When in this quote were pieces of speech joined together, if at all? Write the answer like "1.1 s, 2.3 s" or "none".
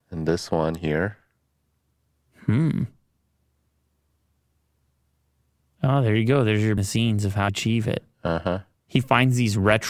6.8 s, 7.5 s